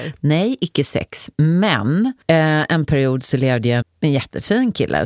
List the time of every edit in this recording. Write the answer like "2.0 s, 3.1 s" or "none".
2.2 s, 3.8 s